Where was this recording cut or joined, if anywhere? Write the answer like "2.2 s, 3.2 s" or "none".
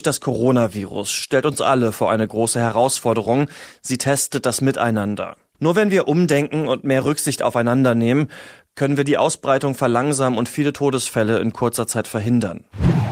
none